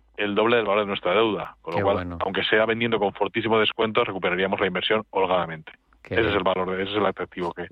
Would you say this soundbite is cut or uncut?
uncut